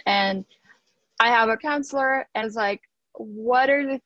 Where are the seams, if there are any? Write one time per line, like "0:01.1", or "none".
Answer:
0:01.6
0:02.4